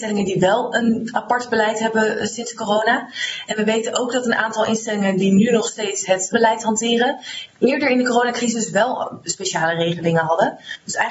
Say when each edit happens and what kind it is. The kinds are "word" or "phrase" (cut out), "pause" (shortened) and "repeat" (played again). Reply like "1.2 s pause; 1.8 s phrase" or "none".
6.3 s word